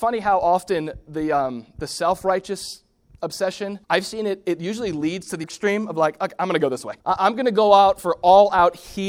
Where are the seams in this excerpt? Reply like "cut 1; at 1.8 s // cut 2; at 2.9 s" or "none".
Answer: cut 1; at 3.8 s // cut 2; at 5.4 s // cut 3; at 7.0 s